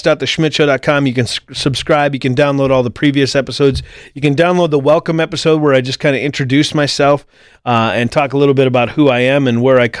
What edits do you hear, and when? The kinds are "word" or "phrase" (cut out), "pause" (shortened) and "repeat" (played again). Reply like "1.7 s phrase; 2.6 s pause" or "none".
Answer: none